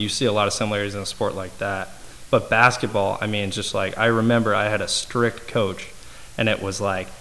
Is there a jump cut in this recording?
no; 0 cuts

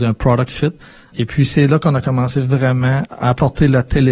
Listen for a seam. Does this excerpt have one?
no; 0 cuts

